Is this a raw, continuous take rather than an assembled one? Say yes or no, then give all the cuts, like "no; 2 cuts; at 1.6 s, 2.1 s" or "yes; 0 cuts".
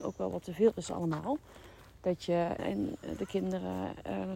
no; 1 cut; at 2.6 s